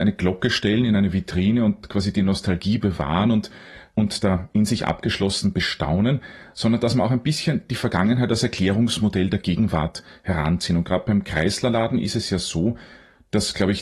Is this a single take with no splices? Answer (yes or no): yes